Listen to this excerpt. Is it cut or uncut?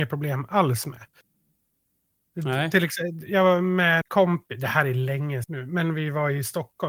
cut